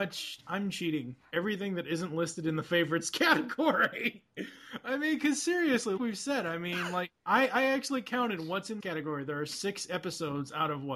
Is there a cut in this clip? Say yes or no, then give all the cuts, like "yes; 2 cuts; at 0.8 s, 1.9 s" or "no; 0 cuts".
yes; 2 cuts; at 6.0 s, 8.8 s